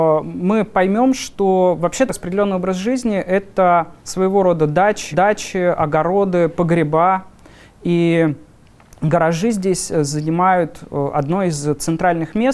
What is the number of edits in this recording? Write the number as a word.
three